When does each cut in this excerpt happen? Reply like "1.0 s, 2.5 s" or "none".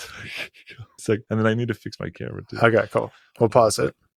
1.0 s